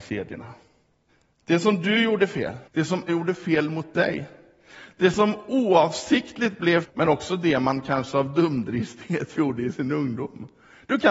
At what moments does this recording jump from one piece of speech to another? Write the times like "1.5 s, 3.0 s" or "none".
1.1 s, 2.7 s, 3.1 s, 6.8 s